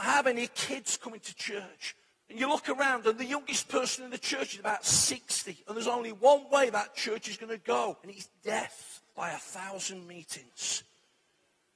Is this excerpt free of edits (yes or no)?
no